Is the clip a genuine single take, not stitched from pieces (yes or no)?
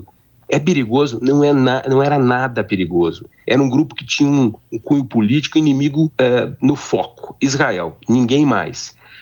no